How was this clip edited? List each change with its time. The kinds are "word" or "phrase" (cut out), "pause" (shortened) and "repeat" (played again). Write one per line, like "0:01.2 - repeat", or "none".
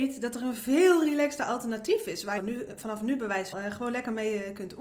0:02.4 - phrase
0:03.5 - phrase